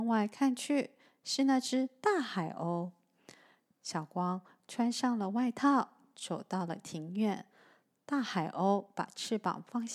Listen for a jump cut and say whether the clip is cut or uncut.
uncut